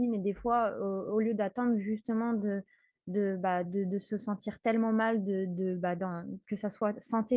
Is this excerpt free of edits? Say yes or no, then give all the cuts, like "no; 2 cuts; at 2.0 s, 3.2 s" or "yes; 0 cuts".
yes; 0 cuts